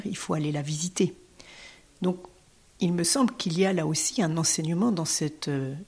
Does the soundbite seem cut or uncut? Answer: uncut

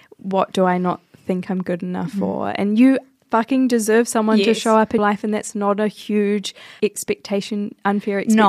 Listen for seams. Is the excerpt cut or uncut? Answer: cut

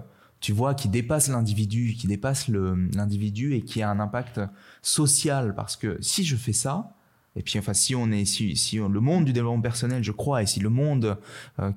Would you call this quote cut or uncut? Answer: uncut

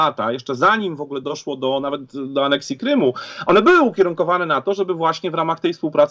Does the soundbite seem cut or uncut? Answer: uncut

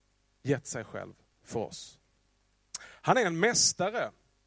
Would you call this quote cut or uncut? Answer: uncut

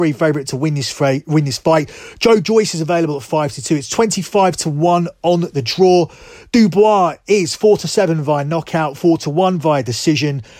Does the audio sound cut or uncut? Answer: uncut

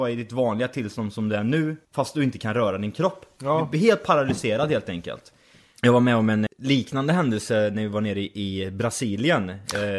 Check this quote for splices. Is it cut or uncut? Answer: cut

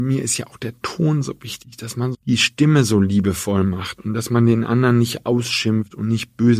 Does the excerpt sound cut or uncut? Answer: cut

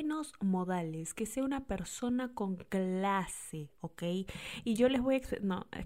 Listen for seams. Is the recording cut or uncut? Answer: uncut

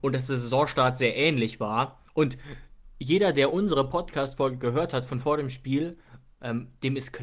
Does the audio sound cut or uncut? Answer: cut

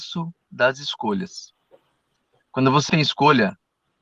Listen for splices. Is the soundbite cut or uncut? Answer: cut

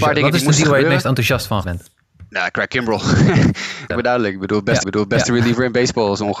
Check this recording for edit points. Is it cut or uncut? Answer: cut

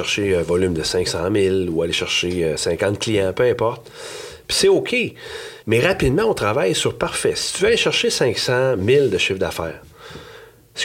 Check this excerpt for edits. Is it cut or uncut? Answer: cut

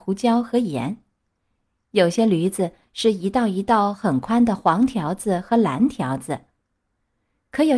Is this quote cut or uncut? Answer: uncut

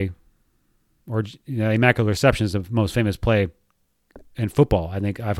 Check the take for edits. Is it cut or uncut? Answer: uncut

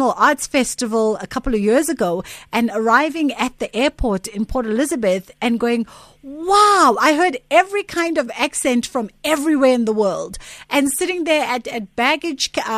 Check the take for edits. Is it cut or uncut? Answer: uncut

